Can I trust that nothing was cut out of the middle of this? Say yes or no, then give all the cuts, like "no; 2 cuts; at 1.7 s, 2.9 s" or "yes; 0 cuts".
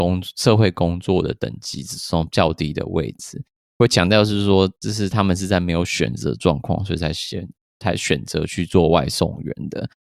yes; 0 cuts